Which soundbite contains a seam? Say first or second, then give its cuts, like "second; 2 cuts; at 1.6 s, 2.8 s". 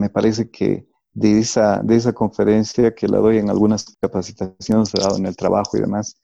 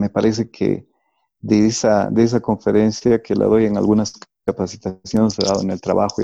first; 2 cuts; at 0.9 s, 3.9 s